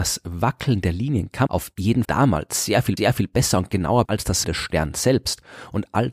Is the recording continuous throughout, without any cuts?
no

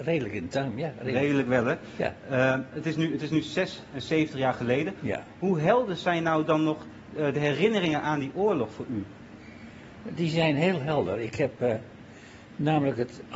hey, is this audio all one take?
yes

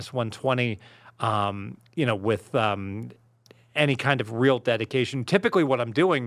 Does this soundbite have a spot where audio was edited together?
no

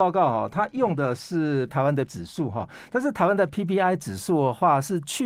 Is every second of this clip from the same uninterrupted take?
no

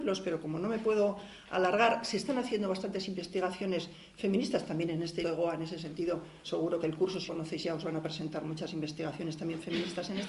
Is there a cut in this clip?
yes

